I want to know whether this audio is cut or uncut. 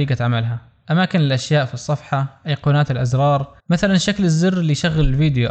cut